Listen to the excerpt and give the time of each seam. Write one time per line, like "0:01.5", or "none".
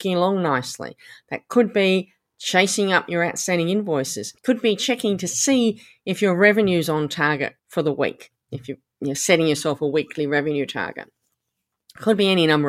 0:04.4
0:07.6